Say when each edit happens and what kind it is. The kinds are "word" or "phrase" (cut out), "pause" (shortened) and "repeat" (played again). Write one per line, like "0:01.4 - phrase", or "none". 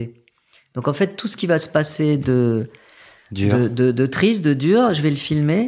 none